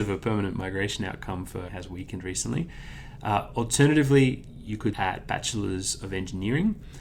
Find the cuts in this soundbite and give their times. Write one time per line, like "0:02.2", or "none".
0:01.7
0:04.9